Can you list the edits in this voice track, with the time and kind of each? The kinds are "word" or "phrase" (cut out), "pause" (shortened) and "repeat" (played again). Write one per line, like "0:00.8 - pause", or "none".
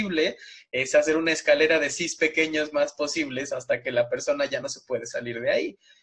none